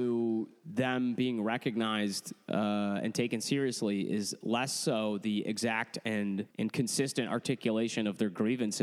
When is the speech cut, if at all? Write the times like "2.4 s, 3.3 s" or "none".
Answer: 6.5 s

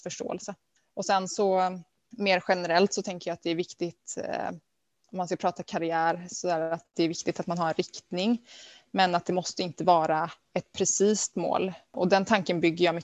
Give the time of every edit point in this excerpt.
none

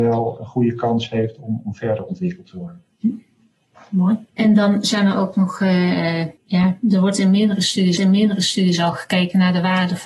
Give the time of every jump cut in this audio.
4.3 s, 6.4 s, 8.0 s

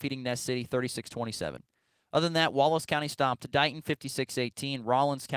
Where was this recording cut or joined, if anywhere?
none

